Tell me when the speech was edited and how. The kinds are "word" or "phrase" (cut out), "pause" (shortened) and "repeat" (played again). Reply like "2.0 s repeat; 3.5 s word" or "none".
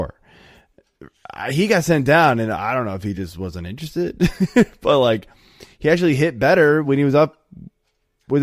none